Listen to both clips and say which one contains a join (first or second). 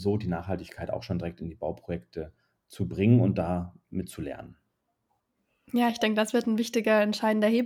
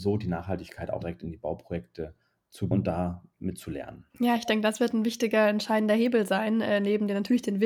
second